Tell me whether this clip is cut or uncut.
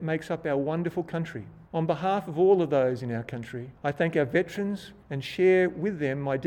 cut